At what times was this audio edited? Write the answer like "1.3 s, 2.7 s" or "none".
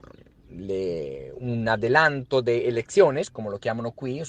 none

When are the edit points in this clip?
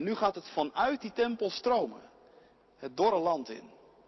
none

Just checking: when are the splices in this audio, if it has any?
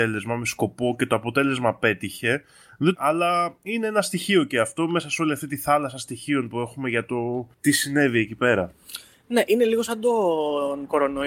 2.9 s

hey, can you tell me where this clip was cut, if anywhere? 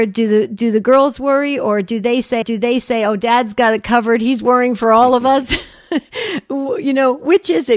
2.4 s

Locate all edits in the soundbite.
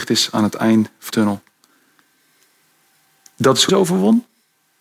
1.1 s, 3.7 s

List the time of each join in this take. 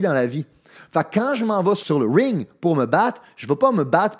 none

